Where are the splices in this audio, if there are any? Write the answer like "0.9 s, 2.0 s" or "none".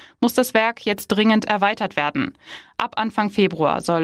none